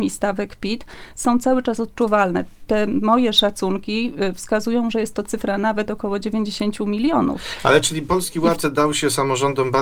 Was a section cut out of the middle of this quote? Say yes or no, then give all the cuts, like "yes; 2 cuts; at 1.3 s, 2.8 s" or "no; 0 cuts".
no; 0 cuts